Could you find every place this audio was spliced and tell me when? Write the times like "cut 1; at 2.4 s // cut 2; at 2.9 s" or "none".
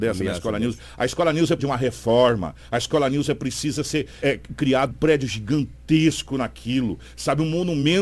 cut 1; at 1.6 s // cut 2; at 4.2 s // cut 3; at 4.9 s